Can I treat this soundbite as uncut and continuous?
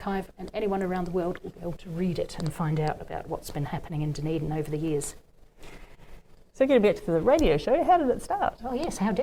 yes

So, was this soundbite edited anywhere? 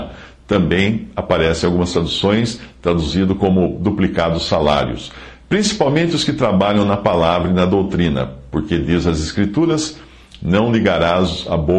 no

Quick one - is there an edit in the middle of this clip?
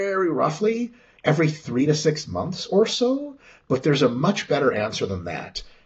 no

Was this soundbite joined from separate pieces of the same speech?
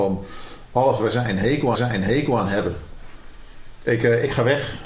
yes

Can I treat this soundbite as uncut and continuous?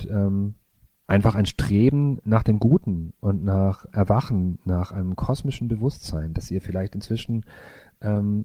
no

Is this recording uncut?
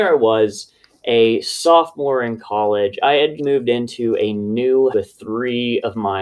no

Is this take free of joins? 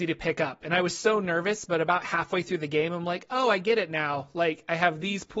yes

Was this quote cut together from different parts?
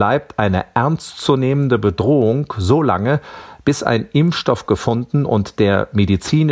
no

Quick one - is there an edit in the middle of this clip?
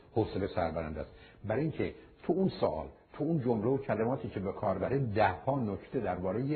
no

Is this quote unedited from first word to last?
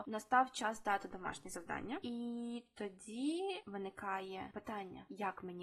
yes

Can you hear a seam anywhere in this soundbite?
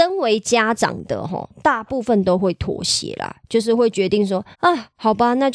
yes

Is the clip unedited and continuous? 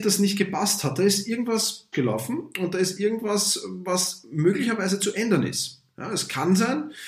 no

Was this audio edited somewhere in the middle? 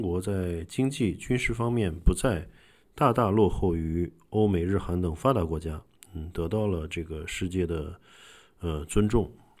no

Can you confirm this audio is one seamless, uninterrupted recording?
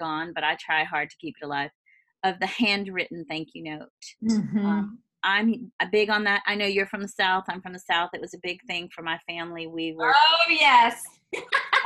yes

